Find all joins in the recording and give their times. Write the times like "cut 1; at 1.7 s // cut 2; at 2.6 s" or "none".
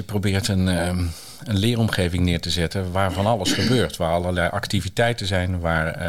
none